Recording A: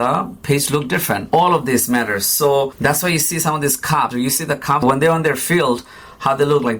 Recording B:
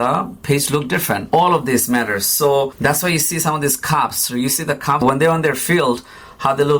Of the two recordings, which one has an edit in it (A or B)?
A